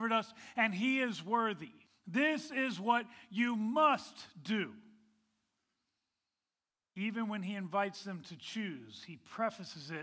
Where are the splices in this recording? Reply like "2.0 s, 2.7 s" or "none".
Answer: 1.8 s